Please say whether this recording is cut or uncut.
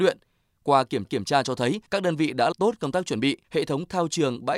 cut